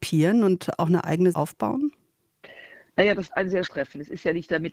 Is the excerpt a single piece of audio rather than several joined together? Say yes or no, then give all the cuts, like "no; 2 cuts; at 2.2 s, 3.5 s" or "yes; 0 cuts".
no; 3 cuts; at 1.3 s, 3.3 s, 3.7 s